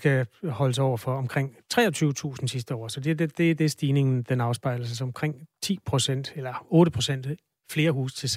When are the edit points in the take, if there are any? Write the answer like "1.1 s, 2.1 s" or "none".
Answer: none